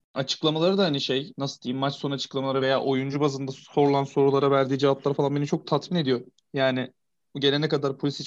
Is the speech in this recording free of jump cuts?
yes; 0 cuts

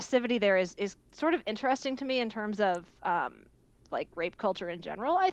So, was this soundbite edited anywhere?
no; 0 cuts

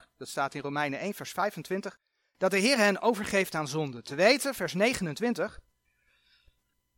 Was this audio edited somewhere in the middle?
no; 0 cuts

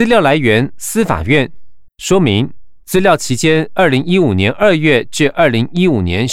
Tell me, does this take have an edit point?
yes; 1 cut; at 1.9 s

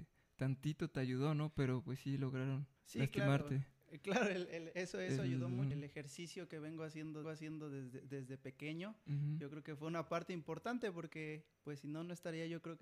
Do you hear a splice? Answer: yes; 4 cuts; at 2.8 s, 5.7 s, 7.2 s, 11.5 s

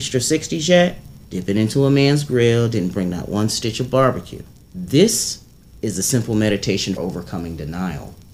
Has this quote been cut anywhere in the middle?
yes; 3 cuts; at 1.2 s, 4.6 s, 7.0 s

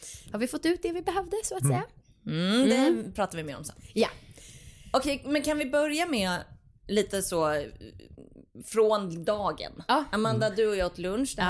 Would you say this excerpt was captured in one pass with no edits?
yes; 0 cuts

